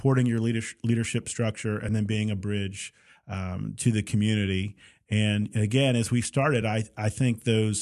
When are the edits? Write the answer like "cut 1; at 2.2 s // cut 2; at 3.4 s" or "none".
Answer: none